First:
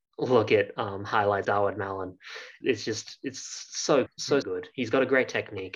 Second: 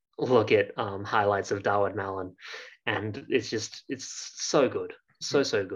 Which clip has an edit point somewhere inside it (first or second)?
first